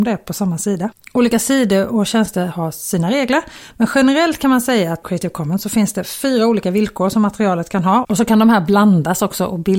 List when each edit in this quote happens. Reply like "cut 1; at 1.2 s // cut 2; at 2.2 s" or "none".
cut 1; at 5.0 s